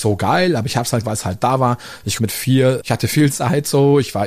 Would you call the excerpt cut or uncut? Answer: cut